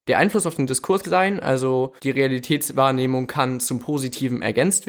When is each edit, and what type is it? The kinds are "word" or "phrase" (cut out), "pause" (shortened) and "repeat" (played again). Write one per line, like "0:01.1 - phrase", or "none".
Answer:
0:01.0 - phrase
0:02.0 - pause